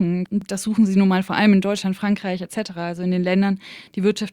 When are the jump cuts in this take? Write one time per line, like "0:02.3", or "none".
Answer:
none

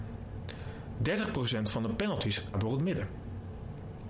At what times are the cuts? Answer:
0:02.5

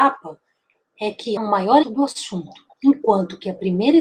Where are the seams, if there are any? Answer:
0:01.4
0:01.8
0:02.7

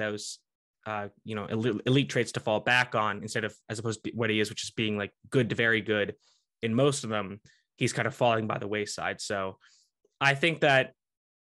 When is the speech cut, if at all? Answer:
none

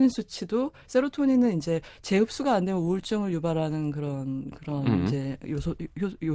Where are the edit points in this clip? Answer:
none

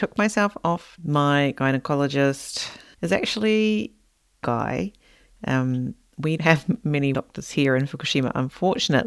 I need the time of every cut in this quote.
0:01.0
0:02.9
0:04.4
0:06.4
0:07.1

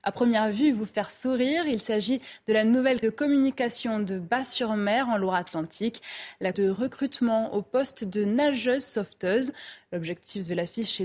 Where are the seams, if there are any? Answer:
0:03.0
0:06.5

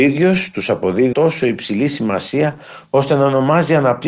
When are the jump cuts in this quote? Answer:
0:01.1

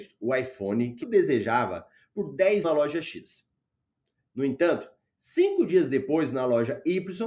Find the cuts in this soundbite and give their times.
0:01.0
0:02.6

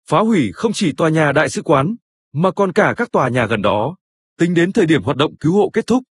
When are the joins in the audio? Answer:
none

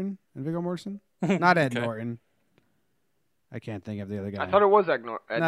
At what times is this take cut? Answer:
none

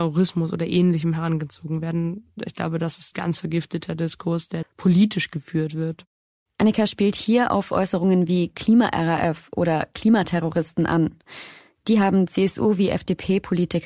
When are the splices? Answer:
0:03.1
0:04.6

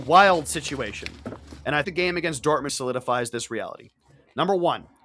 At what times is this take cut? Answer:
0:01.8
0:02.7

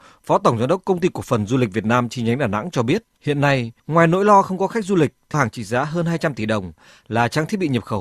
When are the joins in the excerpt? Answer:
0:03.8
0:05.3

